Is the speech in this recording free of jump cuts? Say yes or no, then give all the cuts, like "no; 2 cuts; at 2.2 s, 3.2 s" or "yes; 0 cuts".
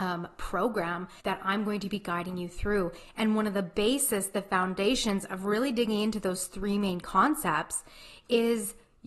no; 1 cut; at 1.2 s